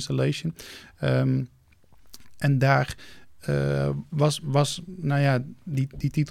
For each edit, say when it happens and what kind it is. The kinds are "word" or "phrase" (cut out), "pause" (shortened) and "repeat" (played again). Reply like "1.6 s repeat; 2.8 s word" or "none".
none